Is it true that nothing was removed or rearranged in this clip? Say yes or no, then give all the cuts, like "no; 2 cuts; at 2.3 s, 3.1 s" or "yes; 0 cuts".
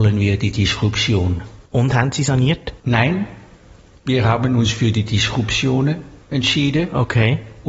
no; 3 cuts; at 1.7 s, 2.8 s, 6.2 s